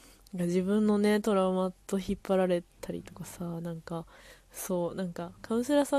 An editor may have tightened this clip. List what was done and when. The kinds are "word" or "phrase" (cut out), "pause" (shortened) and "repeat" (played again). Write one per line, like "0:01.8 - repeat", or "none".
0:01.8 - pause